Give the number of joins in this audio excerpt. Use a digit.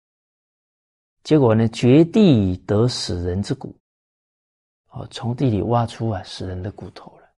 0